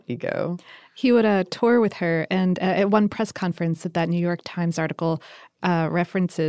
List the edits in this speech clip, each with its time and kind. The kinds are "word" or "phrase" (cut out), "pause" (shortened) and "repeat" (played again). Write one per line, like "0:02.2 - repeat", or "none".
none